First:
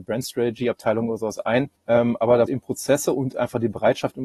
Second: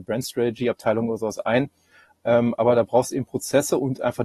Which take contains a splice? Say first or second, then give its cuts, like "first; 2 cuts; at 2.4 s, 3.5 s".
first; 2 cuts; at 1.8 s, 2.5 s